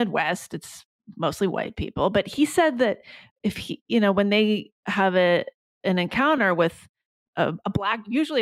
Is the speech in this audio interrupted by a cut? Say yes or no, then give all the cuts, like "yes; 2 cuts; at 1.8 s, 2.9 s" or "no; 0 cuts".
no; 0 cuts